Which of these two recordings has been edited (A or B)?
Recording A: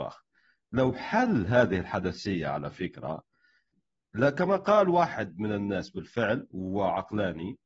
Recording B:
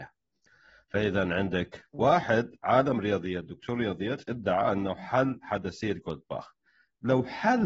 B